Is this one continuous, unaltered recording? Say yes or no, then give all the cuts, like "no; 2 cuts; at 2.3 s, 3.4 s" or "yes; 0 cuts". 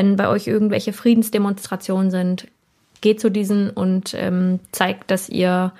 yes; 0 cuts